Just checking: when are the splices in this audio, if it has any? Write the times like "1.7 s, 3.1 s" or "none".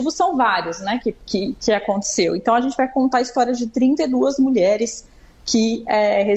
none